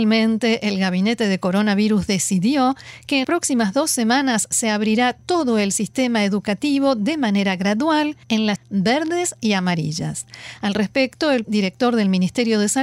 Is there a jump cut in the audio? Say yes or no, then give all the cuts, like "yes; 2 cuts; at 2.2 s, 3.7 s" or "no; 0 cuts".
yes; 4 cuts; at 3.2 s, 8.2 s, 8.6 s, 11.4 s